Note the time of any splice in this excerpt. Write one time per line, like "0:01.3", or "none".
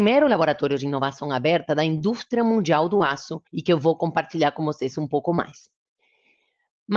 0:03.5